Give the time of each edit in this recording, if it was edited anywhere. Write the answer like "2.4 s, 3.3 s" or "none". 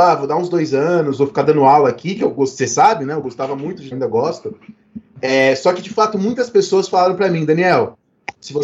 3.9 s